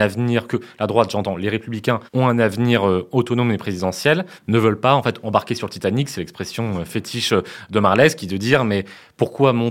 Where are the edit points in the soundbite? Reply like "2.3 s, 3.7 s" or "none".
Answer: 2.1 s, 4.4 s